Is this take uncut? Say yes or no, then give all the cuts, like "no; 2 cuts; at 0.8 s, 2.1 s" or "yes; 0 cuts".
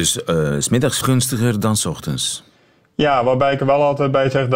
no; 1 cut; at 1.0 s